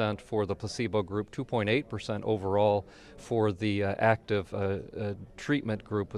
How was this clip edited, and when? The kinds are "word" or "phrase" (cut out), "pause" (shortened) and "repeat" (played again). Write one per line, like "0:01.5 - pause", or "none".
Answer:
none